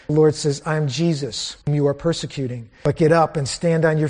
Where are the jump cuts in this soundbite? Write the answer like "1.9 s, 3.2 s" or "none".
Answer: 1.6 s